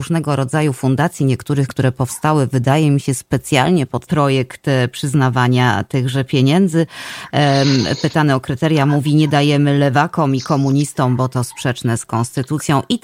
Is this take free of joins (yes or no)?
no